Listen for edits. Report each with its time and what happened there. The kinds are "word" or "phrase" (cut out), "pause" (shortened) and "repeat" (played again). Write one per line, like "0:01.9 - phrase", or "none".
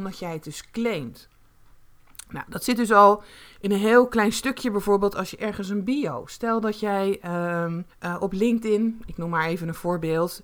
0:07.9 - pause